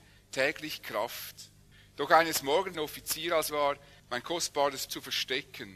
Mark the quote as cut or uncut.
cut